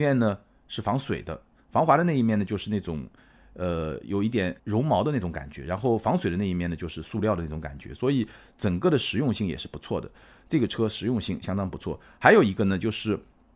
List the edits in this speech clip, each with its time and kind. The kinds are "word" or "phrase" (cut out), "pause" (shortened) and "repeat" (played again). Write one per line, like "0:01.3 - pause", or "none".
0:04.6 - pause